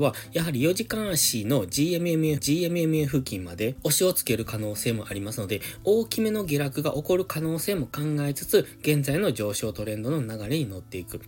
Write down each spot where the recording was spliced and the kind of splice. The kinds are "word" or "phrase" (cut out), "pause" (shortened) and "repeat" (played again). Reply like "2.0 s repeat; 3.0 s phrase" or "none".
2.4 s repeat